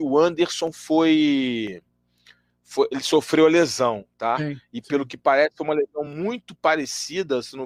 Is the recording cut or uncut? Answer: uncut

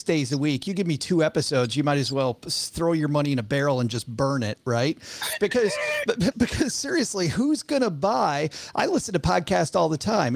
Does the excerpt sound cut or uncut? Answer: cut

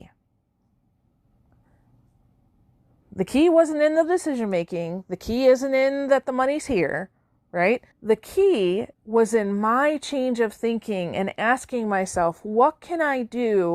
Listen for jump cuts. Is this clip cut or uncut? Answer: cut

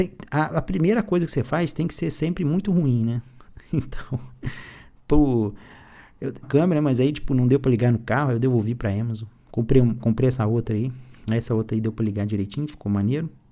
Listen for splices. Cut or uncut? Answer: cut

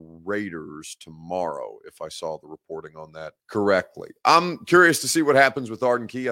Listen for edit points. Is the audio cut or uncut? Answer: cut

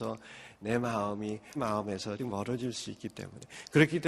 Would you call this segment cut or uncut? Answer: cut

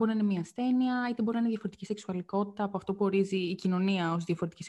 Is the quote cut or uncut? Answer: uncut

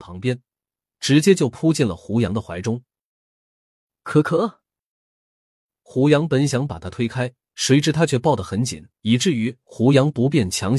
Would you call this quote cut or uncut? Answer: cut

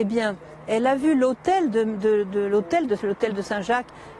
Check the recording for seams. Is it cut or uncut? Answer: cut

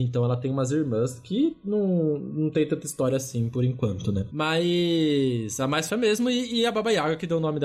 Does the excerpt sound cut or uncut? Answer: cut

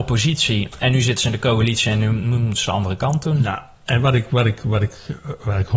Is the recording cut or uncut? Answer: uncut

